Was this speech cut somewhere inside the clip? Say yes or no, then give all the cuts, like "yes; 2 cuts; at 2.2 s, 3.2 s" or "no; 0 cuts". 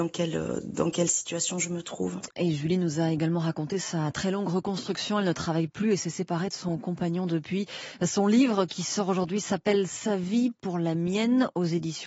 no; 0 cuts